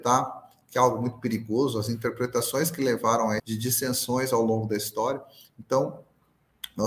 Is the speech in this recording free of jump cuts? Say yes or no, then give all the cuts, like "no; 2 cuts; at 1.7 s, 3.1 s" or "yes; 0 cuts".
no; 1 cut; at 3.4 s